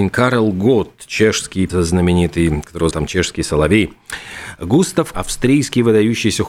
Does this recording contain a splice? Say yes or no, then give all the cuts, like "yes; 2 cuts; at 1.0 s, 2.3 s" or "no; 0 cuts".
yes; 3 cuts; at 1.7 s, 2.9 s, 5.1 s